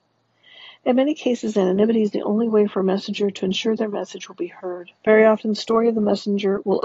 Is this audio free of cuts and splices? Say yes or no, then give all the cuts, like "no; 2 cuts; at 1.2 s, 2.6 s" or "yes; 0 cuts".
no; 1 cut; at 5.0 s